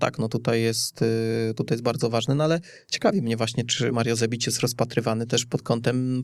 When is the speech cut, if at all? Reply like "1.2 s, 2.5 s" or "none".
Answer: none